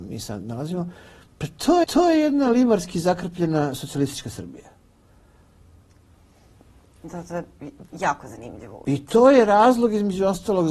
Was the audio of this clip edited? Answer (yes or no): yes